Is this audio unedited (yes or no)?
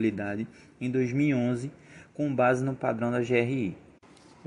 yes